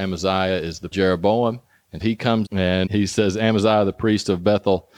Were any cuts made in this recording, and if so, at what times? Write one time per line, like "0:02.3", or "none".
0:00.9
0:02.0
0:02.5
0:02.9